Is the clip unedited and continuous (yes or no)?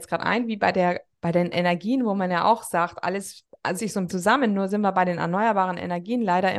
no